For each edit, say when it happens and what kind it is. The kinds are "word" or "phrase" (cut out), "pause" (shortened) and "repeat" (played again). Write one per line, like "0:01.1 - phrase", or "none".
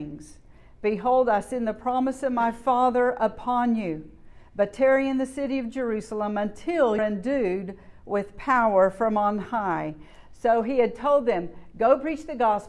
0:07.0 - phrase